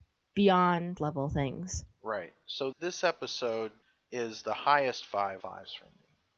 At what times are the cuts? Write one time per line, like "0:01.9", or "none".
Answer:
0:01.0
0:02.7
0:03.8
0:05.4